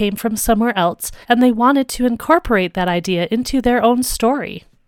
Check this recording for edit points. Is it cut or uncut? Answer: cut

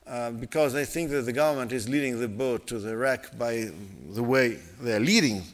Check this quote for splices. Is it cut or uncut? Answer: uncut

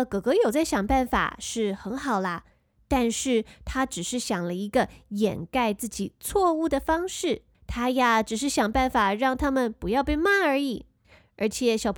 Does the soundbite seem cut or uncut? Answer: uncut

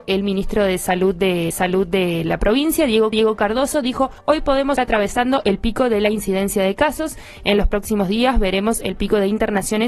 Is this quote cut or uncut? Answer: cut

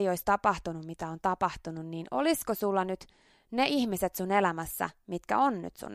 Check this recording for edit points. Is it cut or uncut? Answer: uncut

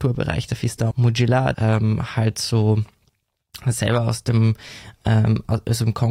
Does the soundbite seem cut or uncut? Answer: cut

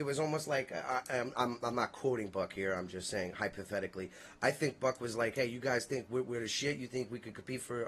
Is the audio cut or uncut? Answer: uncut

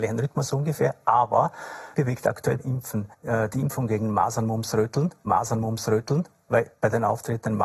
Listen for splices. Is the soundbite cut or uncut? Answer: cut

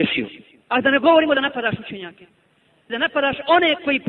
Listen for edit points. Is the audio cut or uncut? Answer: uncut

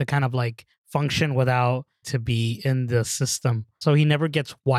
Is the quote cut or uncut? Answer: cut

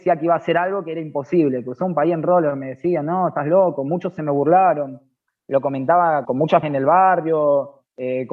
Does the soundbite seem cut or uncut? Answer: cut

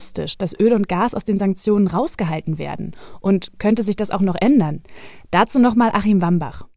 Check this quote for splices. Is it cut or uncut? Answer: uncut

